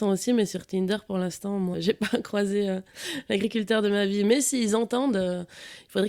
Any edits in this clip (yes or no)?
yes